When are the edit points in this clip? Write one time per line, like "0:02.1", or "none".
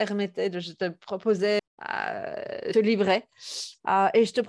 0:01.6
0:02.7